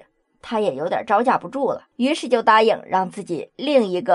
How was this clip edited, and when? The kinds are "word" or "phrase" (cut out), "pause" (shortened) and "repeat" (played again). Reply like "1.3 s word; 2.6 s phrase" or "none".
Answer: 1.9 s pause